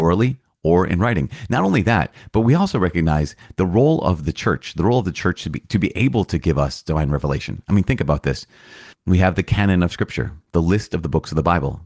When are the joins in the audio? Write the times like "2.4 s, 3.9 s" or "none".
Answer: 8.9 s